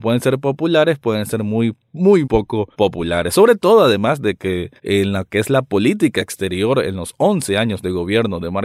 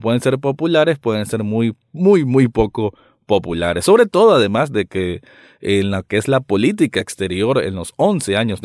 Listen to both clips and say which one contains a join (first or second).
first